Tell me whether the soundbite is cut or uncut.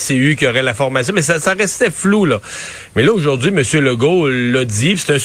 uncut